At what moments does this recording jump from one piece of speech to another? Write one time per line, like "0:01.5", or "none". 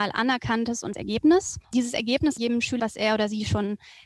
0:00.9
0:01.6
0:02.4
0:02.8